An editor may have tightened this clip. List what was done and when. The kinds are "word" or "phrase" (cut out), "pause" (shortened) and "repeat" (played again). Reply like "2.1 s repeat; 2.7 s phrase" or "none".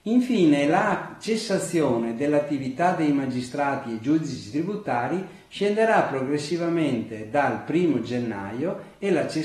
none

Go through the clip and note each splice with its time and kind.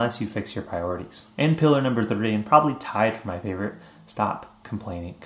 none

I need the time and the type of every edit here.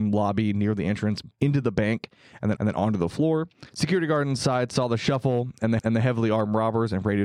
1.3 s word; 2.6 s repeat; 3.7 s pause; 5.8 s repeat

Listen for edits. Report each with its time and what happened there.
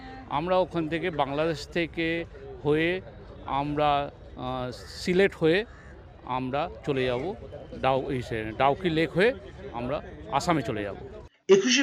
none

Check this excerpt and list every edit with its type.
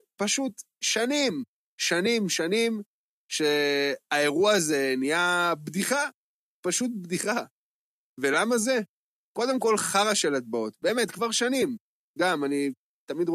none

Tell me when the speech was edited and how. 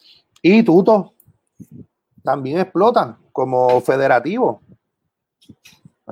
none

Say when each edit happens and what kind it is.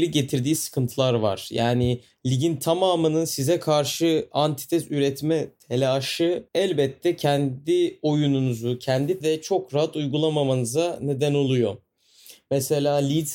6.5 s pause; 9.2 s word

